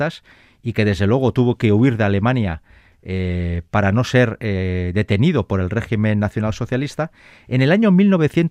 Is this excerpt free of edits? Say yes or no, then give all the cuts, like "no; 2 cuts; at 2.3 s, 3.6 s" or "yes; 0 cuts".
yes; 0 cuts